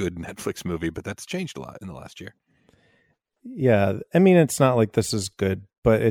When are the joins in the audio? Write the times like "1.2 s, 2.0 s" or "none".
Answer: none